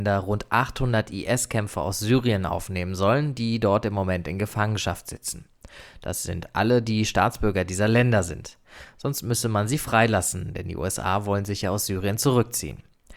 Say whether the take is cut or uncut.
uncut